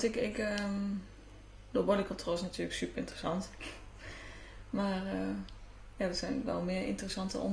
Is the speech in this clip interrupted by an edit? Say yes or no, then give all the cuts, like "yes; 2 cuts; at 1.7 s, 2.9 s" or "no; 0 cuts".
no; 0 cuts